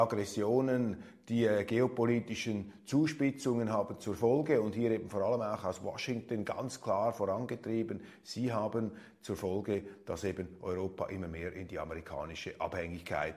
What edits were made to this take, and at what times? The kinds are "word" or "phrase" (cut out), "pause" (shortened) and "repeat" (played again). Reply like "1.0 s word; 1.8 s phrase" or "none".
none